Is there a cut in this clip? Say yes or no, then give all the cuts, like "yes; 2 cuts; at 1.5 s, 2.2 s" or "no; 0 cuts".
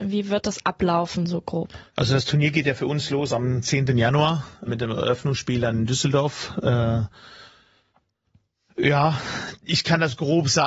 yes; 3 cuts; at 1.9 s, 4.7 s, 9.6 s